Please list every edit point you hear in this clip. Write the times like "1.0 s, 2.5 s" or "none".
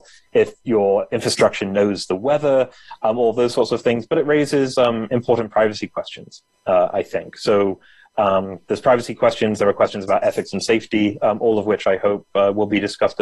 none